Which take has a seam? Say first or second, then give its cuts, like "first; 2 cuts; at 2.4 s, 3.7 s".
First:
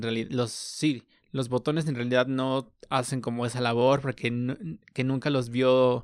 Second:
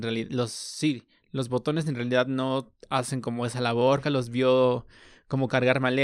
second; 1 cut; at 4.0 s